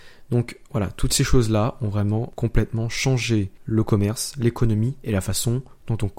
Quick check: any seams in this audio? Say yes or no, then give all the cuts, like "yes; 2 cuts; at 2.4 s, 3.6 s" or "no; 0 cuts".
no; 0 cuts